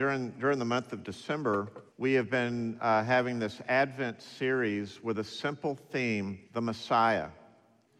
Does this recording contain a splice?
yes; 2 cuts; at 1.9 s, 6.4 s

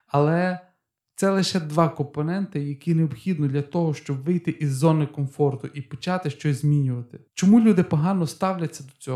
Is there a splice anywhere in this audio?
yes; 1 cut; at 7.3 s

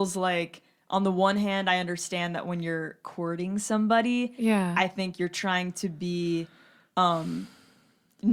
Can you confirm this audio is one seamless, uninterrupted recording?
yes; 0 cuts

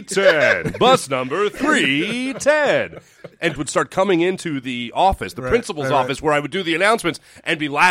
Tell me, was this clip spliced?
yes; 1 cut; at 3.6 s

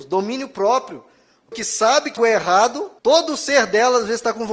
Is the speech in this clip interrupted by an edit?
yes; 3 cuts; at 1.5 s, 2.2 s, 3.0 s

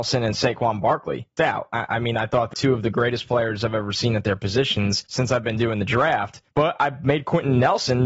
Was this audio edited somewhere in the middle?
yes; 4 cuts; at 1.4 s, 2.5 s, 5.1 s, 6.5 s

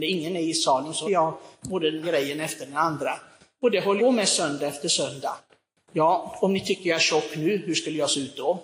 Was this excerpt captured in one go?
no; 3 cuts; at 1.0 s, 2.0 s, 4.0 s

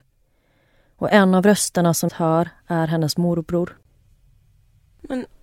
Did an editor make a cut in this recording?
yes; 1 cut; at 2.1 s

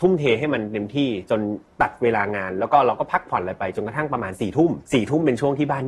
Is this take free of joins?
no; 1 cut; at 4.8 s

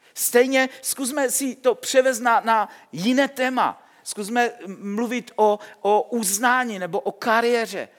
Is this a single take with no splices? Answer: yes; 0 cuts

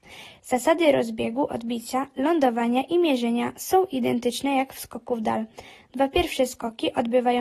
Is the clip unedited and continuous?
yes; 0 cuts

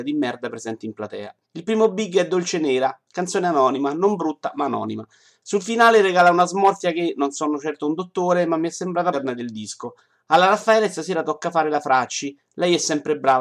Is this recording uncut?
no; 2 cuts; at 1.4 s, 9.1 s

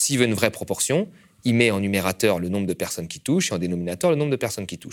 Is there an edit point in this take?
no; 0 cuts

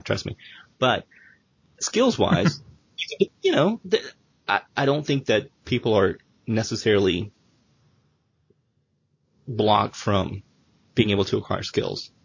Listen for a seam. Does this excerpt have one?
no; 0 cuts

